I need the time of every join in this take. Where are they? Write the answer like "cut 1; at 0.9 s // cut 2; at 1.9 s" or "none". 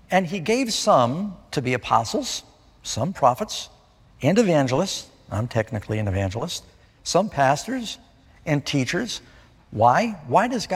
none